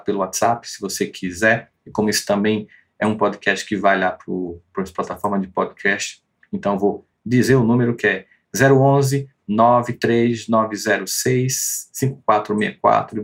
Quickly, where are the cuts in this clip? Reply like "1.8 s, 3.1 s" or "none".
none